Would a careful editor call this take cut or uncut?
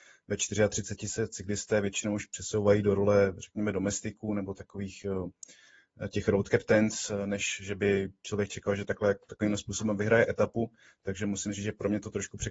uncut